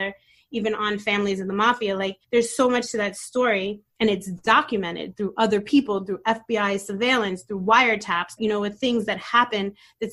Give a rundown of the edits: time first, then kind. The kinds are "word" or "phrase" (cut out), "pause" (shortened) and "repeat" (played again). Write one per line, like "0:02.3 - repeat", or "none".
0:02.2 - pause
0:03.9 - pause
0:08.4 - word